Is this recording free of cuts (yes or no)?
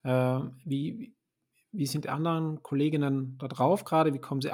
yes